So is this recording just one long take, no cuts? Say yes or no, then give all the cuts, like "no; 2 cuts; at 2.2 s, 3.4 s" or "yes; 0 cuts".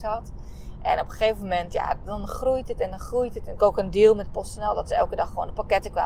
no; 1 cut; at 3.6 s